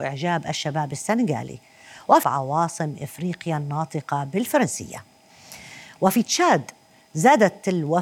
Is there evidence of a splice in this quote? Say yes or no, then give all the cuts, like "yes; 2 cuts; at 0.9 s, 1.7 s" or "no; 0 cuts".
yes; 1 cut; at 2.2 s